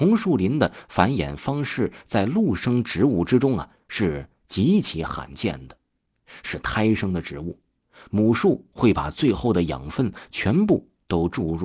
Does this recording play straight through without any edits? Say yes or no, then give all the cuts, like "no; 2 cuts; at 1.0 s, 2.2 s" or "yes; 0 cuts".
yes; 0 cuts